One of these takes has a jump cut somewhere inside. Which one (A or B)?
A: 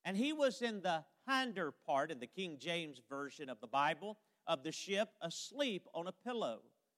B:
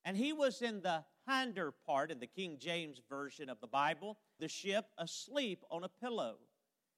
B